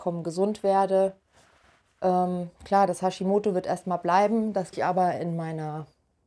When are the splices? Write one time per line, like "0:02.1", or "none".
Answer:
0:04.7